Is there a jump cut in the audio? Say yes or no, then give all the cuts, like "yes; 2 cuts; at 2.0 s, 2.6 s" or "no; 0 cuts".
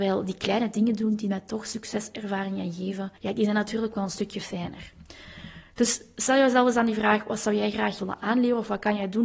yes; 2 cuts; at 3.2 s, 8.0 s